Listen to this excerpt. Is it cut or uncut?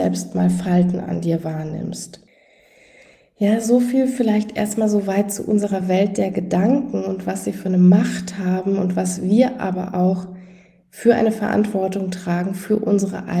uncut